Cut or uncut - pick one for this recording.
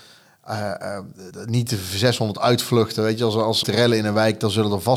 cut